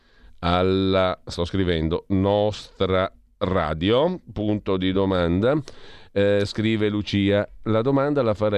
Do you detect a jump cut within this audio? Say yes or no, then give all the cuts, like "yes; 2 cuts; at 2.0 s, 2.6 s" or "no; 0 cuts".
no; 0 cuts